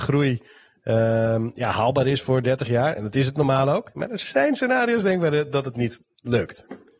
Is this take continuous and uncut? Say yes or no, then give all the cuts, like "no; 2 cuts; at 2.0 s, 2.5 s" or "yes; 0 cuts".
yes; 0 cuts